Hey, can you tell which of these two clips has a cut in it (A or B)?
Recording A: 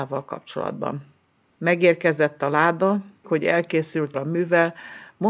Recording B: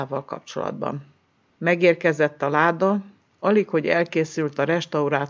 A